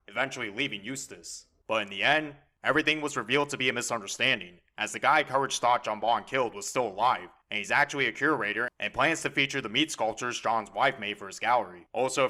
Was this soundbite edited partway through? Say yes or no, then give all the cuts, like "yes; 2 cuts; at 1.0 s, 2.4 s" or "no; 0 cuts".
no; 0 cuts